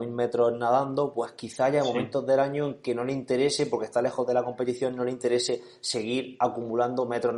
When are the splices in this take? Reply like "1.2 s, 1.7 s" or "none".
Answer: none